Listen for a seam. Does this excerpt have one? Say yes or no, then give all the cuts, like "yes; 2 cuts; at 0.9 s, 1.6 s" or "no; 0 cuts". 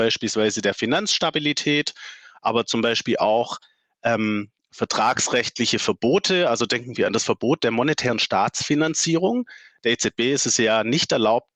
no; 0 cuts